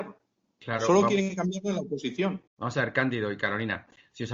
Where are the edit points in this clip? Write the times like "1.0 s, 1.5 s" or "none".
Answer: 2.5 s